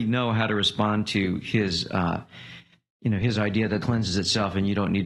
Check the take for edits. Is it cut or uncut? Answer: cut